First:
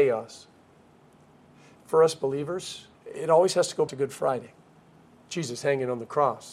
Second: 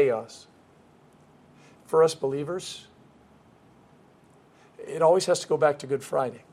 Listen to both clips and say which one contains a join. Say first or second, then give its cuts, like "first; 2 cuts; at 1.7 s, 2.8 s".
first; 2 cuts; at 2.9 s, 3.9 s